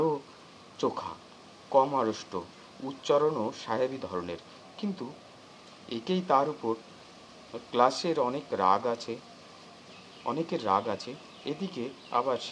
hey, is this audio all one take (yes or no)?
yes